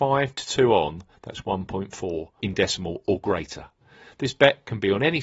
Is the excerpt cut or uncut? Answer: cut